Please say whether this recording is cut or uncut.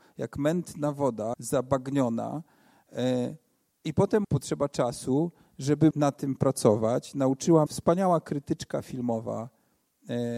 cut